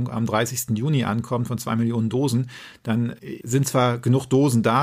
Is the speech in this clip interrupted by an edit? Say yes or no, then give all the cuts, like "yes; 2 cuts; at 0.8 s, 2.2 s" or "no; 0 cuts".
no; 0 cuts